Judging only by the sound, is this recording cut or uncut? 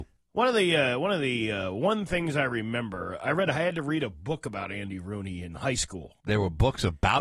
cut